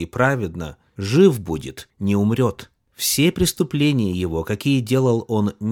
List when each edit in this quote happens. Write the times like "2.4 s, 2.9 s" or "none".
none